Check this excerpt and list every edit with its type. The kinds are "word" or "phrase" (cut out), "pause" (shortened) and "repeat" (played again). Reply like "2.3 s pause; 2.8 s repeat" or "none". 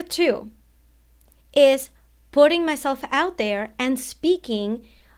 none